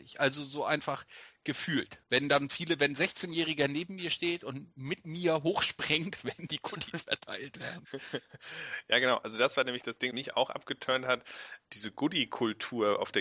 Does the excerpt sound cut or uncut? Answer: cut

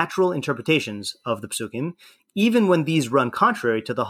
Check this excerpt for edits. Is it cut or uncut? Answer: uncut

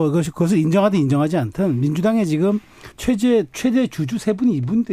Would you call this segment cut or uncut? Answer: cut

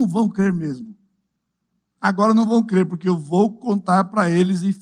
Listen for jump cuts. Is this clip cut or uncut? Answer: uncut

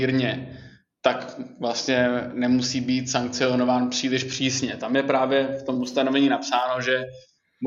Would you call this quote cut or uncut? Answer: uncut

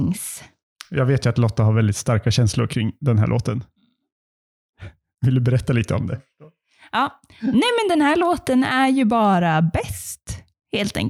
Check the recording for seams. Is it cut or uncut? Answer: uncut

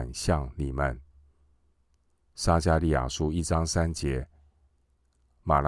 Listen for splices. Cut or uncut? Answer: uncut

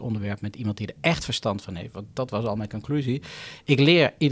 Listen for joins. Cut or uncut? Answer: uncut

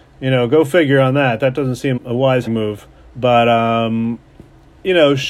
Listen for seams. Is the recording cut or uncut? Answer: cut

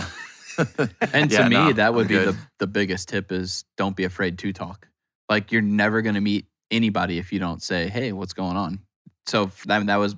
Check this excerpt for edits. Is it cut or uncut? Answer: uncut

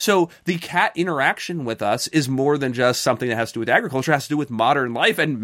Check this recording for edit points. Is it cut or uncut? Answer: uncut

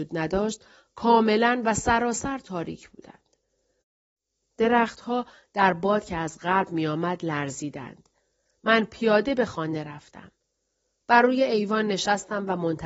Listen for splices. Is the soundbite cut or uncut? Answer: uncut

